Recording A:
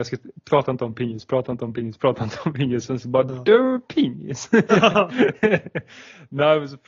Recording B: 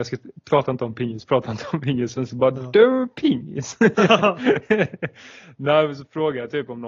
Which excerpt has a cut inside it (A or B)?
B